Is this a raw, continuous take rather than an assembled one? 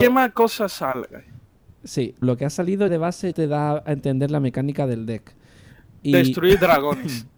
no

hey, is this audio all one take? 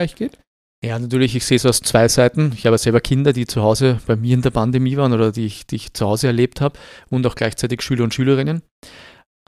yes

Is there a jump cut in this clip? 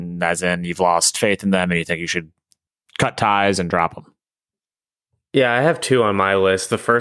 no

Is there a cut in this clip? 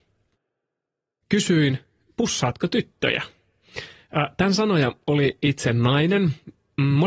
no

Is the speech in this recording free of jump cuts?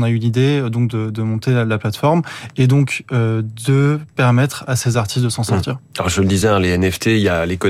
yes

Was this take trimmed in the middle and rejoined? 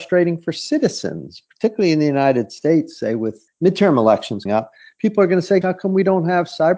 yes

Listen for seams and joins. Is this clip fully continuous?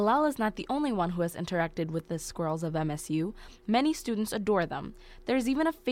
yes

